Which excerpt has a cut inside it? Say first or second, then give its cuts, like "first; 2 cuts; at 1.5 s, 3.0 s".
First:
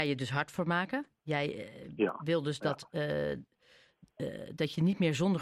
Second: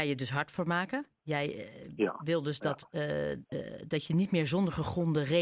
second; 1 cut; at 3.4 s